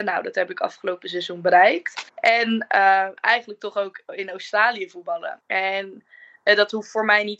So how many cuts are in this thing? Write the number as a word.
two